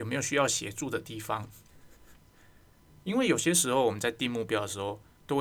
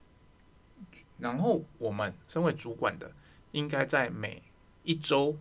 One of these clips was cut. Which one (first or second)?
second